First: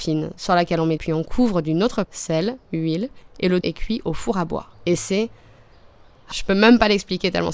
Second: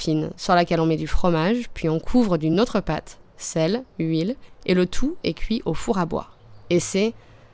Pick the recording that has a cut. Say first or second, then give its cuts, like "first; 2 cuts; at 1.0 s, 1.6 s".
first; 5 cuts; at 1.0 s, 2.0 s, 3.6 s, 4.7 s, 6.3 s